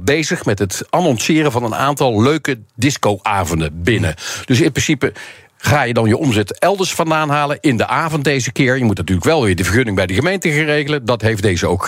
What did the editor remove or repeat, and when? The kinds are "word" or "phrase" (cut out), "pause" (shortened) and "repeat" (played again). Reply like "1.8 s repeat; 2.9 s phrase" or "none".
none

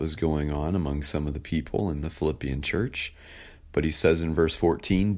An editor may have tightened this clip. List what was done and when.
none

